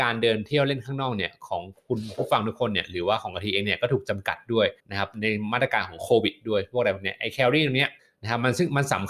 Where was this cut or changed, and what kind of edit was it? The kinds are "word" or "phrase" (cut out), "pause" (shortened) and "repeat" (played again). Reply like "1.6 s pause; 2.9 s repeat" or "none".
4.8 s pause; 8.0 s pause